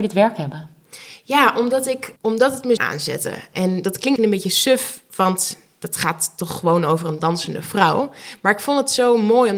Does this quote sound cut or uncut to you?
cut